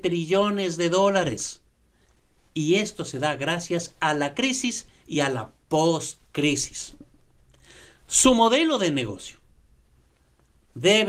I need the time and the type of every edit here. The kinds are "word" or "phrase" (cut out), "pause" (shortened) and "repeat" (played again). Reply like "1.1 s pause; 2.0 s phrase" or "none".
none